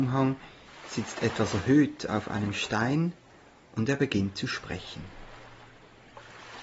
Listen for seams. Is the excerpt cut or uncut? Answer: uncut